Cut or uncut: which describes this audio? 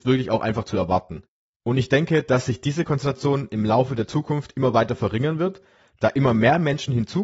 uncut